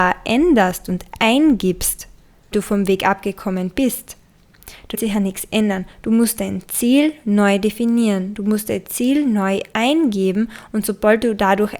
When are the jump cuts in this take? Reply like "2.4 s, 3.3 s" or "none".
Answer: 2.5 s, 4.9 s